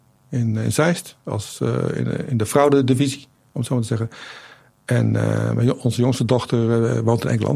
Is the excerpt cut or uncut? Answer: uncut